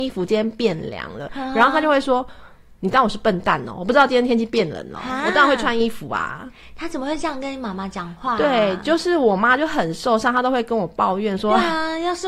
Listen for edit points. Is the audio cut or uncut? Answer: uncut